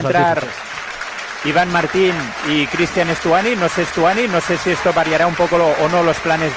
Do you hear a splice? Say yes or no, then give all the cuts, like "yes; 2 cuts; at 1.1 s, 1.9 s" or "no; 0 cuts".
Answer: yes; 1 cut; at 3.9 s